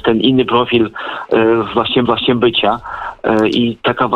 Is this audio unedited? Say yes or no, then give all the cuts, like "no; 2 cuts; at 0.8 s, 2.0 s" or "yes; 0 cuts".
no; 1 cut; at 2.0 s